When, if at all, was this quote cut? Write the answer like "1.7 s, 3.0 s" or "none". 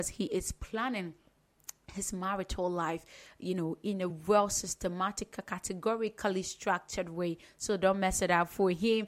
none